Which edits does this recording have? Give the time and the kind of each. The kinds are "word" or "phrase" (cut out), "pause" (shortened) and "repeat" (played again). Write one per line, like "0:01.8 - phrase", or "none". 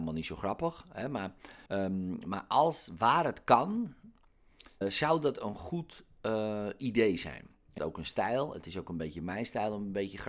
0:01.7 - pause
0:04.8 - word
0:07.8 - phrase